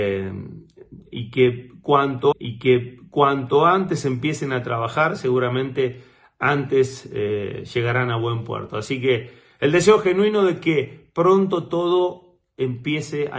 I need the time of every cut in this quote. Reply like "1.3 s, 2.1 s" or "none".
2.3 s

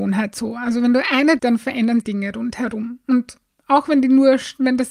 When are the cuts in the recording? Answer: 1.4 s, 2.0 s

